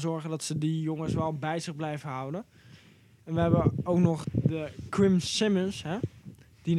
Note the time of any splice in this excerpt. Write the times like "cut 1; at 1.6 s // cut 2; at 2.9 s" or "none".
cut 1; at 4.2 s